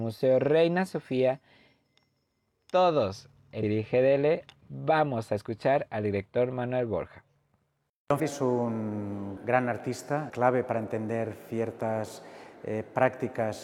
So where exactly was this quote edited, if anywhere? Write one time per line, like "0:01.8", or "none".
0:03.6
0:08.2
0:09.4
0:10.3